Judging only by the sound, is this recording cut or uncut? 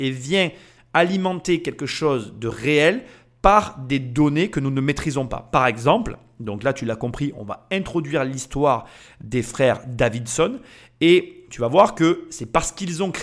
uncut